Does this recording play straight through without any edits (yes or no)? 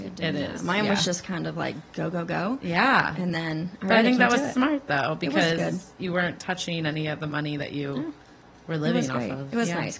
yes